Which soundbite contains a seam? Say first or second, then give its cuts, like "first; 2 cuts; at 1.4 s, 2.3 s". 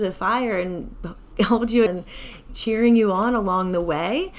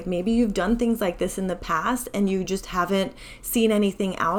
first; 2 cuts; at 1.9 s, 2.5 s